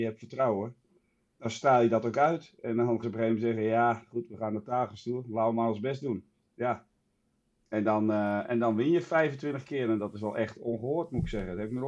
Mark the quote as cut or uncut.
cut